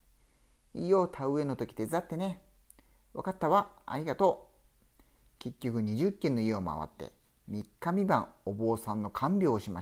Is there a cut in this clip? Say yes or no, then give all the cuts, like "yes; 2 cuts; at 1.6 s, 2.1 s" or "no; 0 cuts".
no; 0 cuts